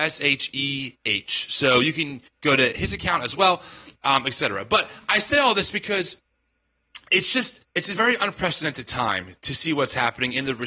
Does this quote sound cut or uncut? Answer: cut